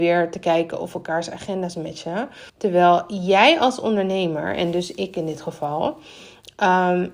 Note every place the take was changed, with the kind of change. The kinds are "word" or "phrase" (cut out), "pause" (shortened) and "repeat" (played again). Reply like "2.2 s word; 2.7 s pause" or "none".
2.5 s pause